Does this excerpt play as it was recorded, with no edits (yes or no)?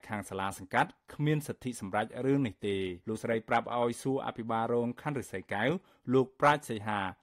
no